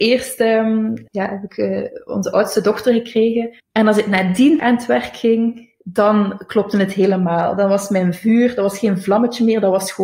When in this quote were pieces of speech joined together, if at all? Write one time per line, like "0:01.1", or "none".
0:01.1
0:03.6
0:04.6
0:05.8